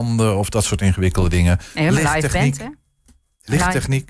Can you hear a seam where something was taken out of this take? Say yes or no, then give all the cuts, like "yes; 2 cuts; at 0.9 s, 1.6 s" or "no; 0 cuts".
no; 0 cuts